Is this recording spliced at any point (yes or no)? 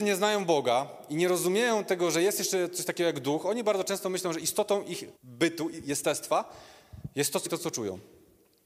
yes